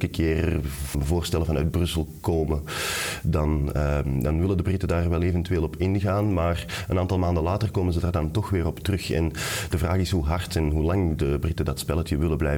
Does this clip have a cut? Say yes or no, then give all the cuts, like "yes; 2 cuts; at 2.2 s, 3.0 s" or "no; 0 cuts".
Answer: yes; 1 cut; at 0.9 s